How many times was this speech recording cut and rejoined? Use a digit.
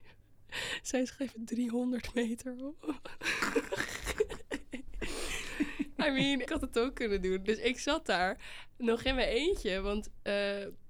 1